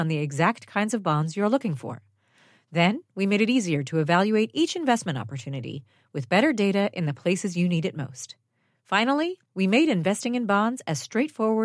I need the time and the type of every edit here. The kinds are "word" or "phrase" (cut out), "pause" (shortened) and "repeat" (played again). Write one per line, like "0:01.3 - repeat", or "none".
0:09.4 - pause